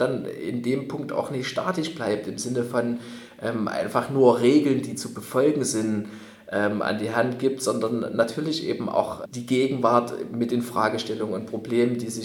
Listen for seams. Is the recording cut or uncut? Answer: uncut